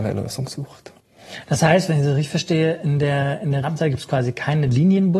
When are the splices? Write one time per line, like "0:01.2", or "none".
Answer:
0:03.6